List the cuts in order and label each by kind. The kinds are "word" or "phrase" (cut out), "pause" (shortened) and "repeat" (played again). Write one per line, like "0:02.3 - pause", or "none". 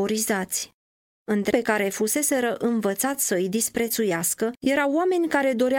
0:01.5 - word

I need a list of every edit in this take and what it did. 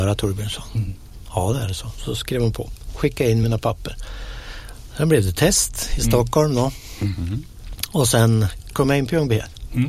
none

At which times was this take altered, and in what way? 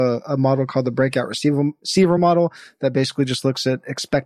none

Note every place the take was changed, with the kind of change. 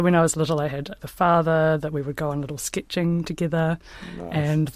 0:01.0 - word
0:03.2 - word

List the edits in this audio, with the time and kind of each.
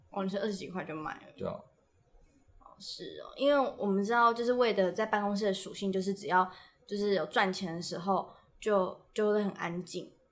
none

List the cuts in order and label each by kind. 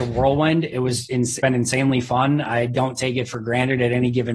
0:01.4 - word

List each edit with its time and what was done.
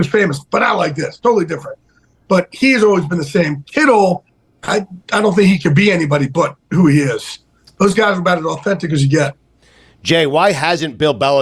none

